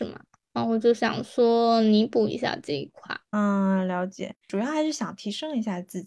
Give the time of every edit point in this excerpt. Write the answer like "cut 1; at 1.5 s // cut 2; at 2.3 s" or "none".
cut 1; at 3.2 s